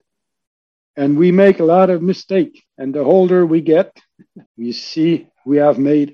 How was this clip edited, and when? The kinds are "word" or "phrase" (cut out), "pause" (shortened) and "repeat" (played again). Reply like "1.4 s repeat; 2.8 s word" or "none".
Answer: 2.7 s pause; 4.5 s pause